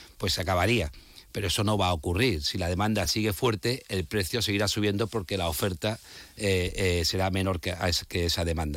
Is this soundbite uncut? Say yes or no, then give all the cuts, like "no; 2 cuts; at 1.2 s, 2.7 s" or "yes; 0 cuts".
yes; 0 cuts